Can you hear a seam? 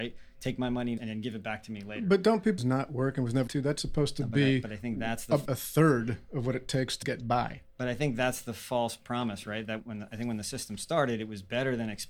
yes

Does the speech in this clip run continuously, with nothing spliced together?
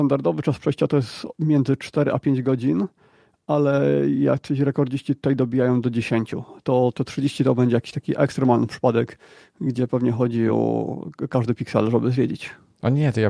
yes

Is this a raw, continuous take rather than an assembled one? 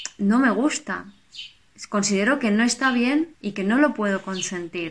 no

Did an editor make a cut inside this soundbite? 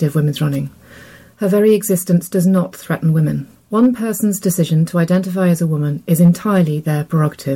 yes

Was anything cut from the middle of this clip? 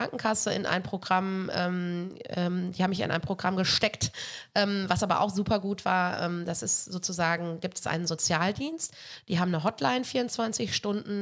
no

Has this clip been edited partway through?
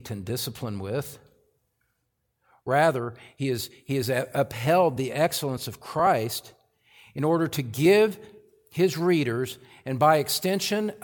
no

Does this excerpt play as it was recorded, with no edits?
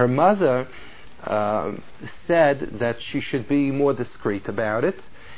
yes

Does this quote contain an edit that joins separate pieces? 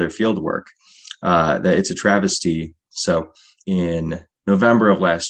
no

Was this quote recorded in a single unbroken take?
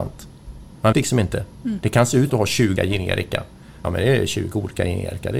no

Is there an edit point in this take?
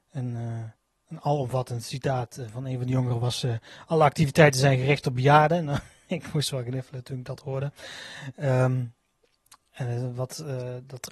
no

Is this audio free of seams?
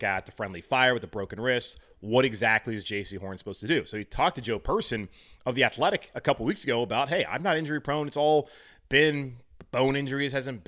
yes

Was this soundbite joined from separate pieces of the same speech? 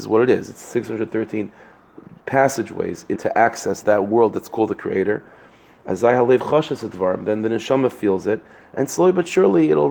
yes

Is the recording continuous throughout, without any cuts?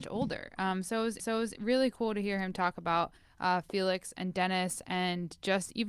no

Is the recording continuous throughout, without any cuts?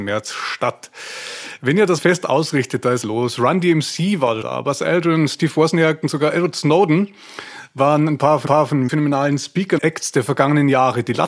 no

